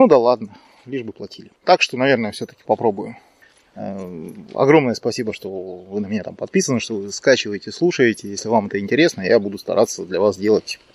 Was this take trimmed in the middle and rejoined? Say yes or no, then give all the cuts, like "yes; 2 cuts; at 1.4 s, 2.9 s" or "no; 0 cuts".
yes; 2 cuts; at 1.6 s, 4.5 s